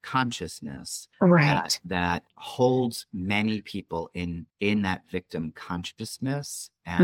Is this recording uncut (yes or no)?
no